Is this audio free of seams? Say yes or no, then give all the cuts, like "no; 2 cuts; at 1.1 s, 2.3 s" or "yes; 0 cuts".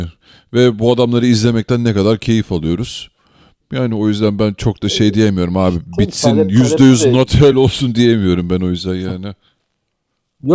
yes; 0 cuts